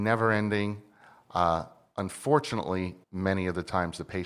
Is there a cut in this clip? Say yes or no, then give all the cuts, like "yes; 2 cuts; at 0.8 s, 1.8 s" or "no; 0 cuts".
yes; 1 cut; at 3.0 s